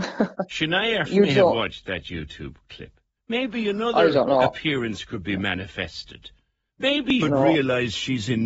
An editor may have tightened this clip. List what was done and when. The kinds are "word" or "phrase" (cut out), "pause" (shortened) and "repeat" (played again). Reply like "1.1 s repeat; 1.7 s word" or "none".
1.1 s word; 3.2 s pause; 7.2 s word